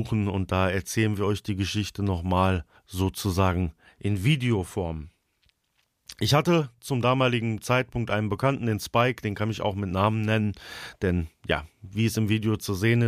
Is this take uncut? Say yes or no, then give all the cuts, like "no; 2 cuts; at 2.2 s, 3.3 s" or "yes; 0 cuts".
no; 1 cut; at 2.8 s